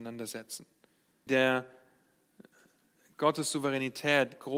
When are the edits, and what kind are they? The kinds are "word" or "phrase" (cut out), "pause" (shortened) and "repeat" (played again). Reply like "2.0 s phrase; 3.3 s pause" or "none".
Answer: 1.3 s word

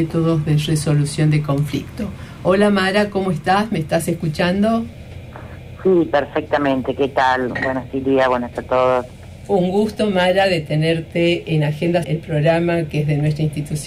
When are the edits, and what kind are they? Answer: 7.9 s word; 8.5 s word; 12.0 s word

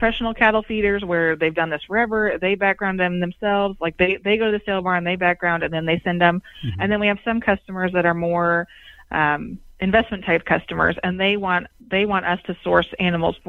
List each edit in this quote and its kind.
11.7 s pause

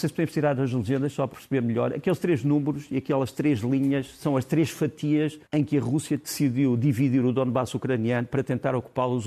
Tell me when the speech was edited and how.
1.3 s word; 5.5 s pause

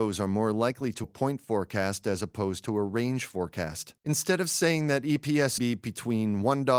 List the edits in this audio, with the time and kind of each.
1.0 s word; 4.0 s pause; 5.6 s phrase

